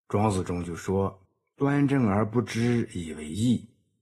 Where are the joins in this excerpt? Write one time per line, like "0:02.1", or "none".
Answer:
0:01.3